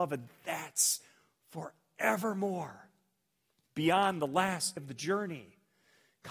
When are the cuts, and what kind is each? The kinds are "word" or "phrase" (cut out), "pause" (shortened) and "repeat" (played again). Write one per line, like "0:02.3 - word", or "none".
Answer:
0:04.8 - word